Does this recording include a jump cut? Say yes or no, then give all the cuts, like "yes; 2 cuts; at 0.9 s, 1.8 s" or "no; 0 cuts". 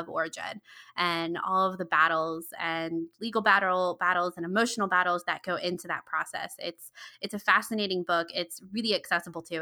no; 0 cuts